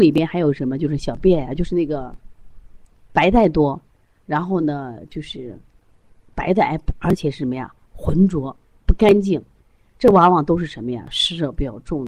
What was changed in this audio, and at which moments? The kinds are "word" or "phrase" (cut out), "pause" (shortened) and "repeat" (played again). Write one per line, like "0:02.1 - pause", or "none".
none